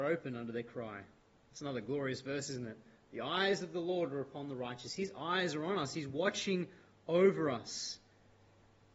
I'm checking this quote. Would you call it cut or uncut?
uncut